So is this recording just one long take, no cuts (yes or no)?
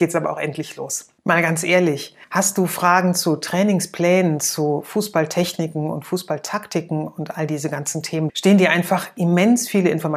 no